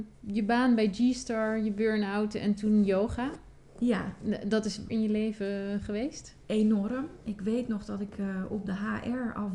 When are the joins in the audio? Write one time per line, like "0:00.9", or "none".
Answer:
0:04.9